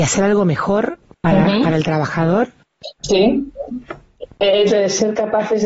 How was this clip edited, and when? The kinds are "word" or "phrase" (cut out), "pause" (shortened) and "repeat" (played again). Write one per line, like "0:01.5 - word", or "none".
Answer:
0:03.0 - pause
0:04.7 - word